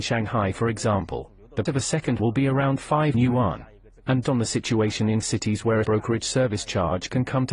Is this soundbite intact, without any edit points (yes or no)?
no